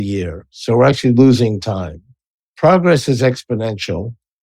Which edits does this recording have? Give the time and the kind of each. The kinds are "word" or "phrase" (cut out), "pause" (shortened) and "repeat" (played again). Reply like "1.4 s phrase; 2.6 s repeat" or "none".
none